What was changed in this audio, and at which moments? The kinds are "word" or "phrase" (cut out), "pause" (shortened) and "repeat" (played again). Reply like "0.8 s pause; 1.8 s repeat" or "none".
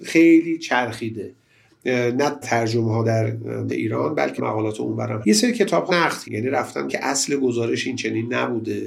2.4 s word; 3.7 s word; 4.4 s word; 5.2 s word; 5.9 s word; 6.2 s word; 6.9 s word